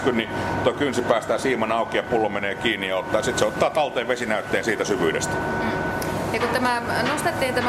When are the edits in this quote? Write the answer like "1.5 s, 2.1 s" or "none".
none